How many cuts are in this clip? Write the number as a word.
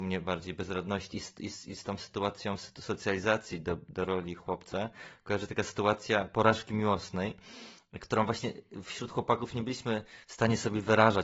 zero